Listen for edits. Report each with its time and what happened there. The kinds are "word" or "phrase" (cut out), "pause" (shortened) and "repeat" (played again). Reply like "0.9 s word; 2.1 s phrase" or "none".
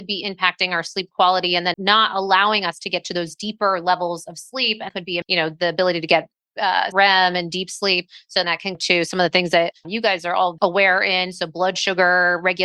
1.7 s word; 4.9 s word; 5.2 s word; 6.9 s word; 8.4 s word; 8.7 s word; 9.8 s word; 10.6 s word